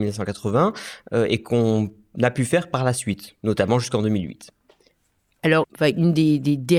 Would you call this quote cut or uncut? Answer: uncut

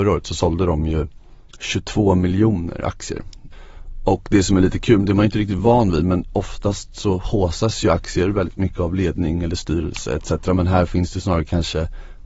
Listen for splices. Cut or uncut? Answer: uncut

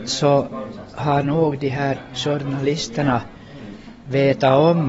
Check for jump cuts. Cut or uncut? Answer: uncut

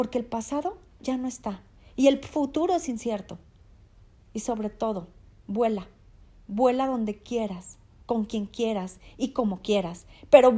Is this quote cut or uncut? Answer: uncut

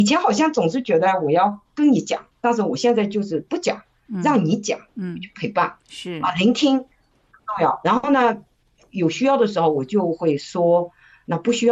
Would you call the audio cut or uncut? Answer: cut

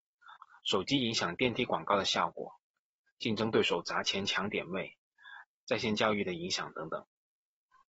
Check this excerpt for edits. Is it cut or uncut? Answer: cut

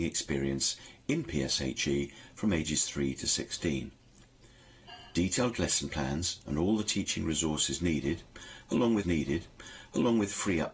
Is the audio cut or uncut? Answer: cut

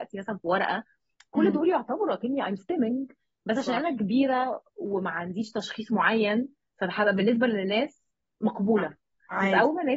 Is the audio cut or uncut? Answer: uncut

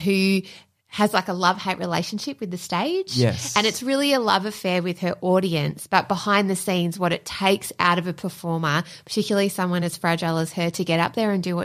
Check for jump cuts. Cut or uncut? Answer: uncut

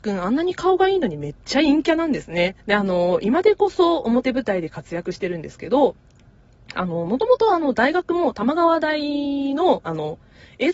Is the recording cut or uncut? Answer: cut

